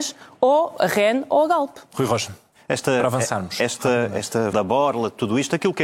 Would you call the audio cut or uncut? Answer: cut